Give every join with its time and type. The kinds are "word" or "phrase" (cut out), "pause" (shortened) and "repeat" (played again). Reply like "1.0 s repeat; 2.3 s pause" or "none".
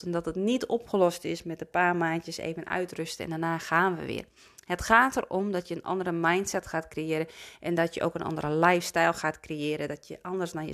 none